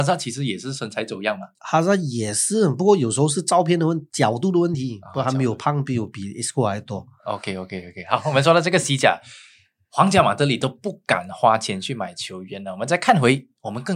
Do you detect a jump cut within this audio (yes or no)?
yes